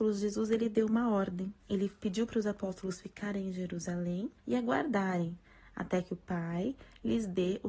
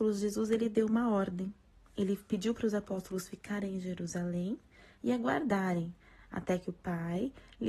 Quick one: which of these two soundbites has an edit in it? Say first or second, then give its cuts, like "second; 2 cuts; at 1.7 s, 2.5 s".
first; 2 cuts; at 1.6 s, 4.4 s